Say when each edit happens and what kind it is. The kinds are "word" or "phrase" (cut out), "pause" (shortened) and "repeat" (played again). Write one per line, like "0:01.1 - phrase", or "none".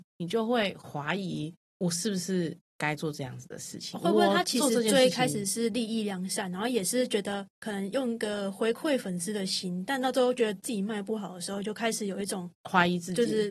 0:02.6 - pause

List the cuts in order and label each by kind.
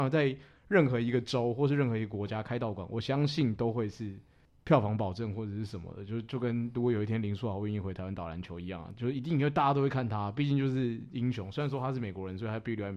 none

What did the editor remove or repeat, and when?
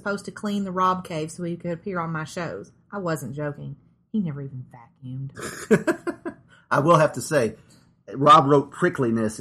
none

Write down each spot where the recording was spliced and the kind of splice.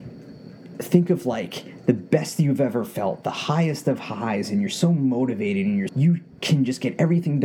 0:05.9 - word

